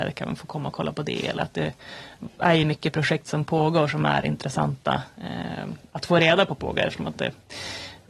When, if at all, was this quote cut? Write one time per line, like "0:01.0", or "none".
none